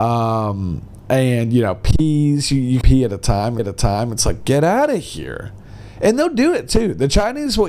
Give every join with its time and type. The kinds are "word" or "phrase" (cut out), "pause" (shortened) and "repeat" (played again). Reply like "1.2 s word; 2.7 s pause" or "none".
2.8 s phrase; 3.6 s repeat

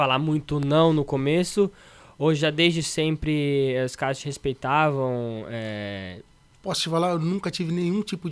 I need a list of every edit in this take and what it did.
none

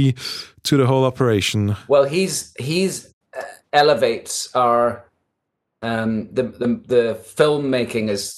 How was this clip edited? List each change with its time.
none

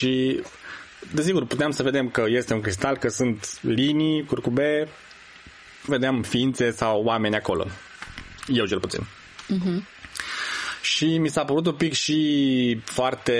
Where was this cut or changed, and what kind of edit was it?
5.9 s phrase

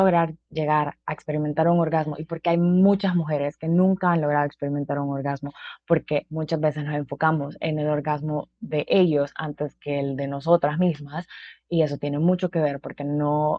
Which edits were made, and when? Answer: none

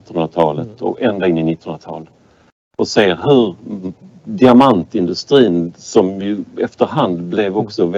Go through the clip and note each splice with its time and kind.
none

